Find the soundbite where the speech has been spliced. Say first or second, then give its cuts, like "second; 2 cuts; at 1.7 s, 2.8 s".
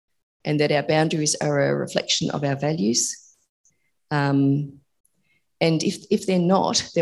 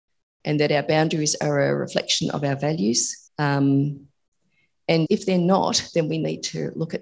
second; 2 cuts; at 3.3 s, 5.1 s